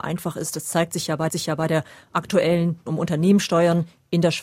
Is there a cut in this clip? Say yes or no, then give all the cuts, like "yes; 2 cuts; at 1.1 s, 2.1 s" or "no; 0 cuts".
yes; 2 cuts; at 1.3 s, 2.9 s